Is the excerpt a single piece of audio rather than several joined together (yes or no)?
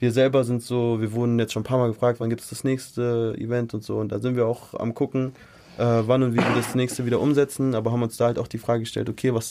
yes